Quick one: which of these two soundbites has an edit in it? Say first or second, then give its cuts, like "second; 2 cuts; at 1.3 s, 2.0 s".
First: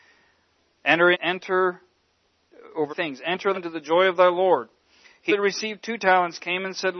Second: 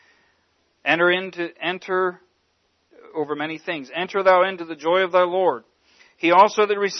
first; 4 cuts; at 1.1 s, 2.9 s, 3.5 s, 5.3 s